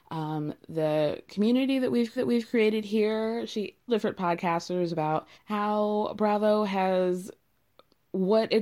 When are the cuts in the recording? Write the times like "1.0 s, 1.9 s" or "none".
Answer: 2.2 s, 3.9 s, 5.3 s

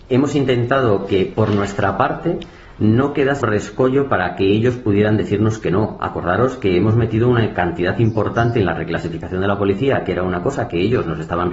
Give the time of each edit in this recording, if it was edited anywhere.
3.4 s

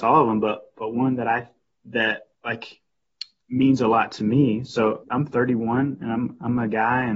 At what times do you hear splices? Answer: 5.0 s

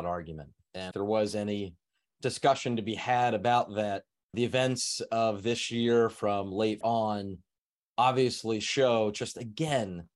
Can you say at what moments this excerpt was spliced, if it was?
0.9 s, 4.3 s, 6.8 s

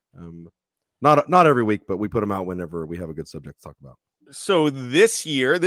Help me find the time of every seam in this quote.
none

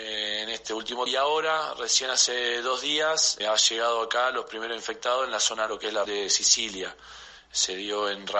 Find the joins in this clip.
1.1 s, 3.4 s, 5.7 s, 6.0 s

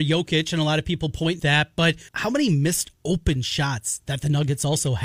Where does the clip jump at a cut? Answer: 1.4 s, 2.1 s

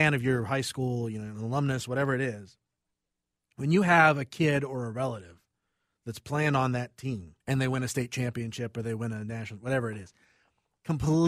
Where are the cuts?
7.4 s

